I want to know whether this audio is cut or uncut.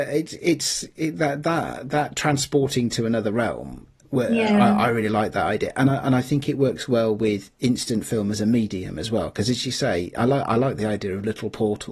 uncut